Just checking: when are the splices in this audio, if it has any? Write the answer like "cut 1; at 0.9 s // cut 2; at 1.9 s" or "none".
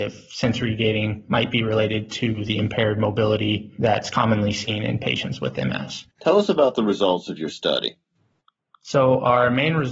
cut 1; at 6.1 s